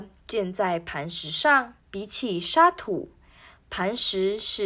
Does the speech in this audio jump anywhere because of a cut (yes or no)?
yes